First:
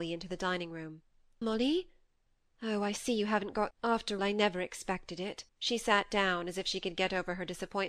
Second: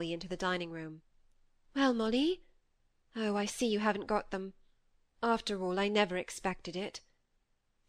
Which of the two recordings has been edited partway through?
first; 4 cuts; at 1.4 s, 3.7 s, 4.2 s, 5.5 s

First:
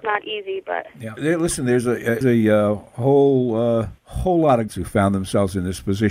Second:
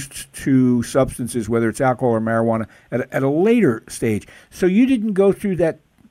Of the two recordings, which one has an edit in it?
first; 4 cuts; at 1.2 s, 2.2 s, 4.0 s, 4.7 s

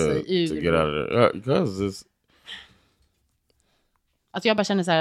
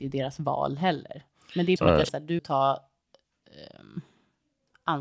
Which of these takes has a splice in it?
second; 3 cuts; at 1.8 s, 2.1 s, 2.4 s

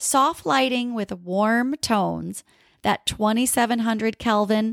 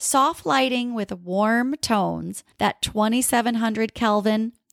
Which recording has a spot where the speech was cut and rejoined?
second; 1 cut; at 2.5 s

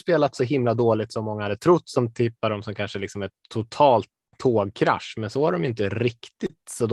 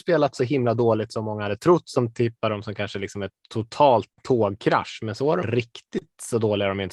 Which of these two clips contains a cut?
second; 2 cuts; at 4.1 s, 5.4 s

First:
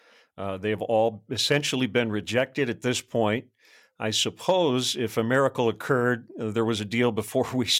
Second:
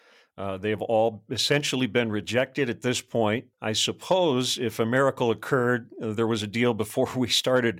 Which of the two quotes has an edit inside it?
second; 1 cut; at 3.5 s

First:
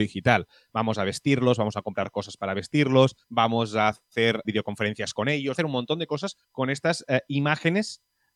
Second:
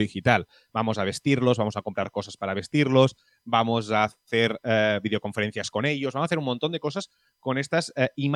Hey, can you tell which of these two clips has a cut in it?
first; 4 cuts; at 3.2 s, 4.4 s, 5.5 s, 6.4 s

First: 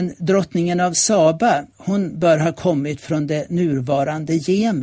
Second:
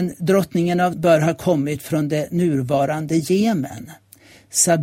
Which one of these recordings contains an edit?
second; 1 cut; at 0.9 s

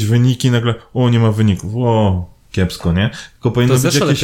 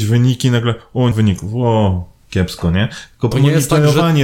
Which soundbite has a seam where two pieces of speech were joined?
second; 2 cuts; at 1.1 s, 3.3 s

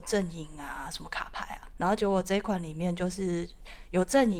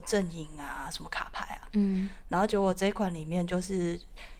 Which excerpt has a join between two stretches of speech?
first; 1 cut; at 1.7 s

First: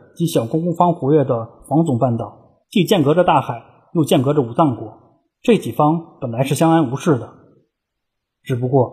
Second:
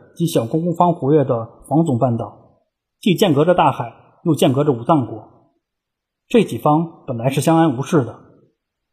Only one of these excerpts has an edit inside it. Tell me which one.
first; 2 cuts; at 2.6 s, 5.3 s

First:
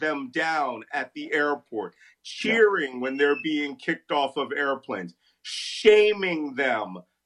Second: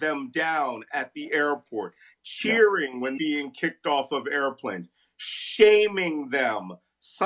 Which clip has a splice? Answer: second; 1 cut; at 3.2 s

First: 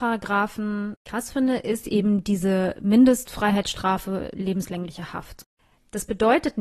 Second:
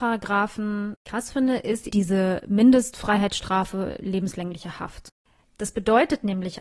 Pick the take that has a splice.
second; 1 cut; at 1.9 s

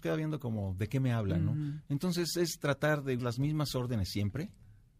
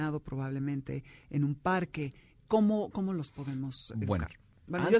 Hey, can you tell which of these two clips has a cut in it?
first; 1 cut; at 3.2 s

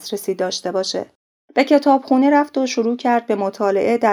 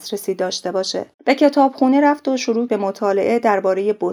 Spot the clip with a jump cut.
second; 2 cuts; at 1.1 s, 2.7 s

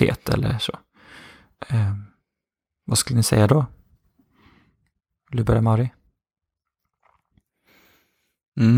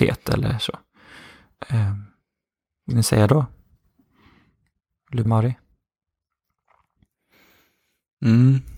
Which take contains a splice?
second; 2 cuts; at 2.9 s, 5.3 s

